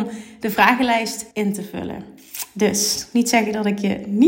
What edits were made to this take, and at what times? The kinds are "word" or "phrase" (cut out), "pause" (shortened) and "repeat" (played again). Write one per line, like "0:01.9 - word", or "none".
0:01.3 - pause